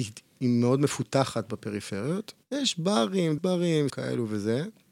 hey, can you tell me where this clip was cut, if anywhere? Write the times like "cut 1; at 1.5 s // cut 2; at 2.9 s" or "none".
cut 1; at 2.4 s // cut 2; at 3.4 s // cut 3; at 3.9 s